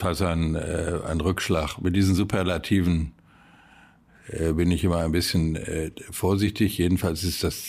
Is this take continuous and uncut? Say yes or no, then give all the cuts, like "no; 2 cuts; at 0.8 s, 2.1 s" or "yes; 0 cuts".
yes; 0 cuts